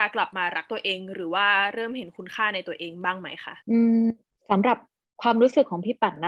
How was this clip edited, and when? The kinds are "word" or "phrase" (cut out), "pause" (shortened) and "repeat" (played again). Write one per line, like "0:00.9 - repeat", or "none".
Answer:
0:03.6 - pause